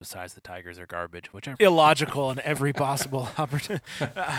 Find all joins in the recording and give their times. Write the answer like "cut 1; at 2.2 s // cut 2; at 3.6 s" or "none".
cut 1; at 1.5 s